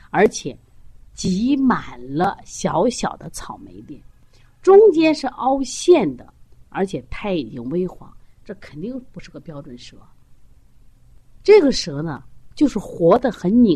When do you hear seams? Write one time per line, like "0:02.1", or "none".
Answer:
none